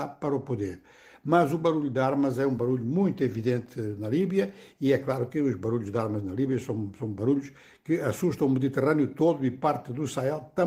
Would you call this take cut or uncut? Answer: uncut